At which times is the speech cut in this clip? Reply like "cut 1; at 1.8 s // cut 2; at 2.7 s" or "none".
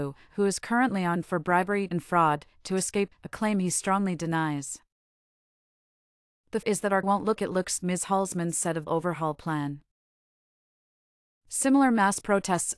cut 1; at 1.2 s // cut 2; at 3.1 s // cut 3; at 6.6 s // cut 4; at 7.0 s // cut 5; at 7.4 s // cut 6; at 7.8 s // cut 7; at 8.9 s